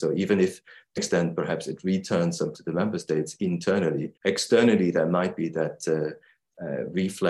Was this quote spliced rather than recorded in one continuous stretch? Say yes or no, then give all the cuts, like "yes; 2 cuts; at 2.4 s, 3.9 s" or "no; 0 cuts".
yes; 3 cuts; at 1.0 s, 2.5 s, 4.2 s